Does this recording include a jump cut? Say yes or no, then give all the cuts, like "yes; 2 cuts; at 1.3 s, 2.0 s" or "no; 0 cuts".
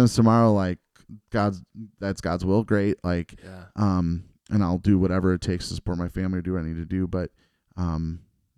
no; 0 cuts